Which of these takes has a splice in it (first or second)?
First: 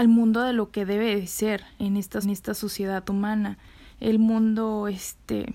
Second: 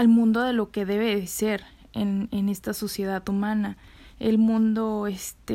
first